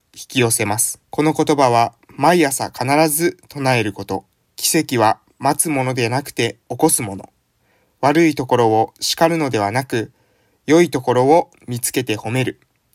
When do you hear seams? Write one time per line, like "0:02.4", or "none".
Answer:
0:01.0
0:04.4
0:06.6
0:07.6